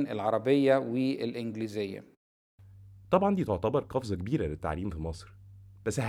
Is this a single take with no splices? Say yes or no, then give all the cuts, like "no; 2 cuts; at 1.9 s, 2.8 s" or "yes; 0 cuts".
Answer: yes; 0 cuts